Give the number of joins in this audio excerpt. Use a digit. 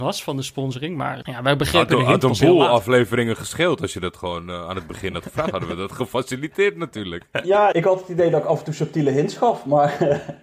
2